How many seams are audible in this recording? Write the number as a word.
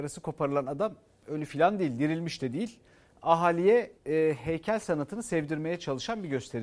one